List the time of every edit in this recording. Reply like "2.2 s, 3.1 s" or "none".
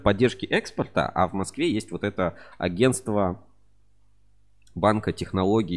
none